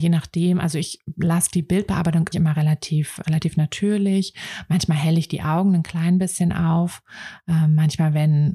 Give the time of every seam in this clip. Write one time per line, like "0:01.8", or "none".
0:02.3
0:03.2